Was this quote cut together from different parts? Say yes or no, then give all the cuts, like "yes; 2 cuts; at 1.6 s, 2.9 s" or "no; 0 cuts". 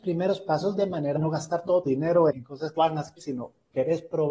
yes; 5 cuts; at 1.2 s, 1.9 s, 2.3 s, 2.8 s, 3.2 s